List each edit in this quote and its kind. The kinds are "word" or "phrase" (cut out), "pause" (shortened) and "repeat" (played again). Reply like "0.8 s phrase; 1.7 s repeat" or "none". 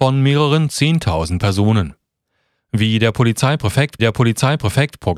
4.0 s repeat